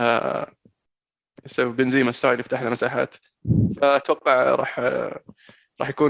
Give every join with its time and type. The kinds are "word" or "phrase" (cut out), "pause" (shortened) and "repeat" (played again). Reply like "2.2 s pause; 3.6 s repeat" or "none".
none